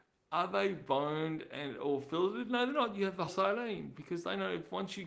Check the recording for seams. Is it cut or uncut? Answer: cut